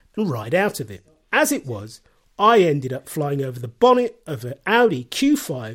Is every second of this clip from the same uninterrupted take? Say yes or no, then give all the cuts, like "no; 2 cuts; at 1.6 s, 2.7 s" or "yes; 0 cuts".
yes; 0 cuts